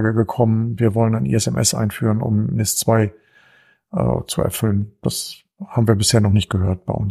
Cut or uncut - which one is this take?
uncut